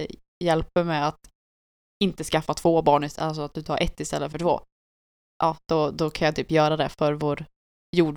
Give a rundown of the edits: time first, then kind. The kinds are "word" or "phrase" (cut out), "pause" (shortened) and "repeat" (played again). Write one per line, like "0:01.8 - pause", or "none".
none